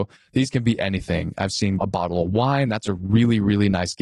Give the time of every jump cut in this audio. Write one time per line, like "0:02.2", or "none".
none